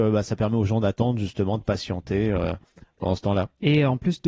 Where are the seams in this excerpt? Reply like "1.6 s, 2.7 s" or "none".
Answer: none